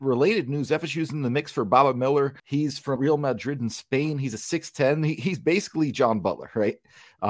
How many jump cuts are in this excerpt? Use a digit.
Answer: 2